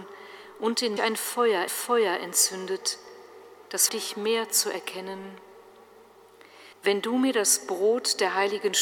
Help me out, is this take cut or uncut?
cut